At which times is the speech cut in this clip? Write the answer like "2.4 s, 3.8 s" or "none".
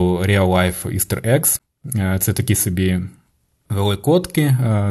none